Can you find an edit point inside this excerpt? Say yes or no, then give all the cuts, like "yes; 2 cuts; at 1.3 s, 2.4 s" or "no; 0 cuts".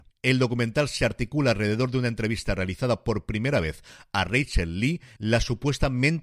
no; 0 cuts